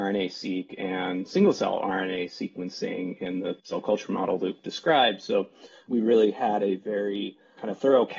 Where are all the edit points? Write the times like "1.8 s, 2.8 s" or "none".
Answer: 3.6 s